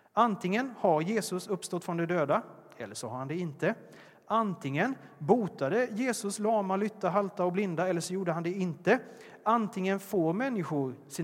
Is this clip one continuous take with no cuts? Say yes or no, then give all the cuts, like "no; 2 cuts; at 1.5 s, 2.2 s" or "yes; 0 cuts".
yes; 0 cuts